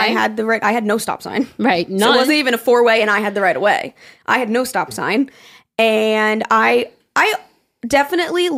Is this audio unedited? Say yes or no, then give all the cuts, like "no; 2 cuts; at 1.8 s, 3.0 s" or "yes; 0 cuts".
yes; 0 cuts